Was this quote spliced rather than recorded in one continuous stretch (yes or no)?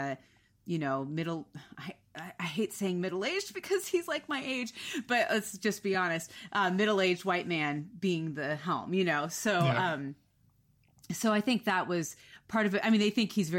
no